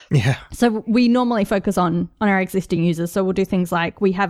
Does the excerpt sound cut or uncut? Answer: uncut